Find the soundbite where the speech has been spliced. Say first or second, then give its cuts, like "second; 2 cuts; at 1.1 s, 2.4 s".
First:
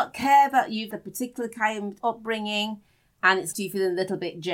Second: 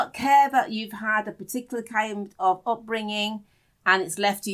first; 3 cuts; at 0.9 s, 2.0 s, 3.5 s